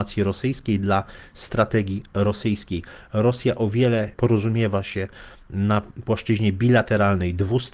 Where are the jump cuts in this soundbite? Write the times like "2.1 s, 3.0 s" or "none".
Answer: 4.1 s